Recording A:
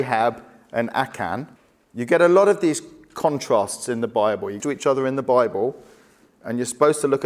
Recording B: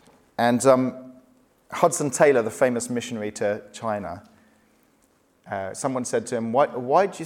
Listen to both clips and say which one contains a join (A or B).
A